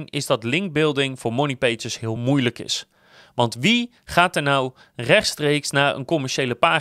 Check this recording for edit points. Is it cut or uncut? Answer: uncut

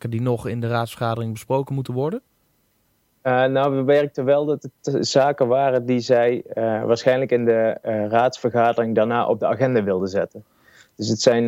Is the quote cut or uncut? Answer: uncut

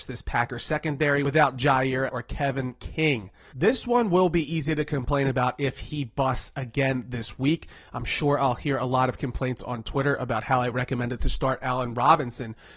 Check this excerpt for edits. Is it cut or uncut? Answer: cut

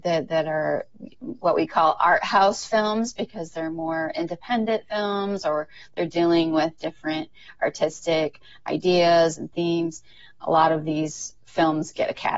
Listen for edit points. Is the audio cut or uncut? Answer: uncut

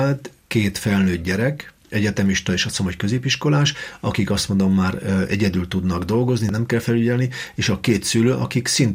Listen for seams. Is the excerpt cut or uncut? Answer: uncut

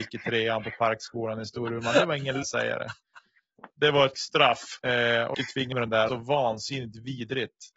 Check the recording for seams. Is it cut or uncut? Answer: cut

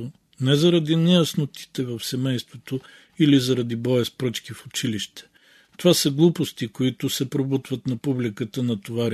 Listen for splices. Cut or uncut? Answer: uncut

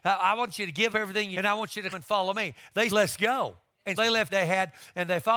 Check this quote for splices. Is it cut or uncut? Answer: cut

